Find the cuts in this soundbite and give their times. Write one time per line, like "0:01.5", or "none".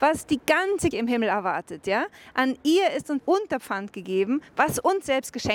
0:00.9
0:03.2